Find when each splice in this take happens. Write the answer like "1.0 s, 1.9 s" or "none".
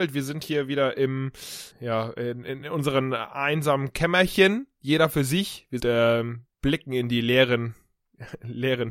1.7 s, 5.8 s